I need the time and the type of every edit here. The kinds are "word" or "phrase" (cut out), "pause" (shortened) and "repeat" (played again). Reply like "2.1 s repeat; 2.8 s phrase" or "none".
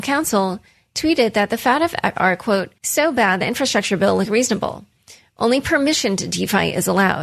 2.2 s word; 2.8 s pause; 3.4 s phrase